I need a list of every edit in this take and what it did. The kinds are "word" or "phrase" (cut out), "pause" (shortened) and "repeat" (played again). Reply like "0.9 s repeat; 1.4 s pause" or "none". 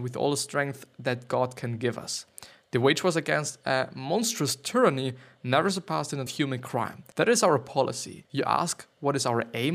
6.3 s phrase